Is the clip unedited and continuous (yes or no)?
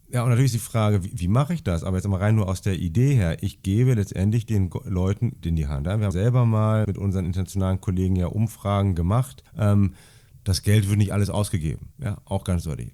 no